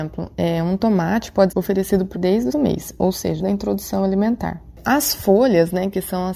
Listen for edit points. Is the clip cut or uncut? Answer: cut